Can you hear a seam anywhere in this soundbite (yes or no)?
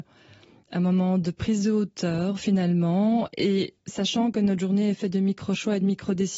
yes